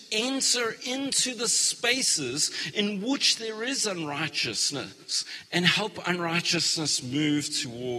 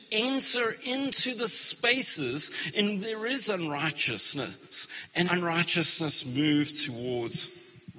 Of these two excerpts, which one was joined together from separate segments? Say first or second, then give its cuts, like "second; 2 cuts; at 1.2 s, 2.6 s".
second; 2 cuts; at 3.0 s, 5.3 s